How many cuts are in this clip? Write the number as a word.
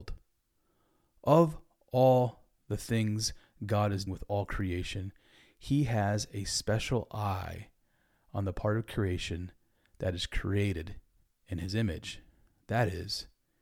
one